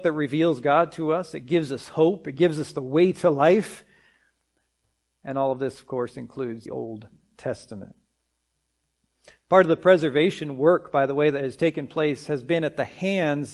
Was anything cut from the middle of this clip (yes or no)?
yes